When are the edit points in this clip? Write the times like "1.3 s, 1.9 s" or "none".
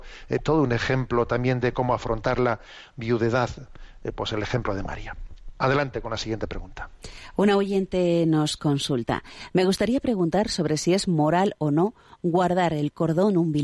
none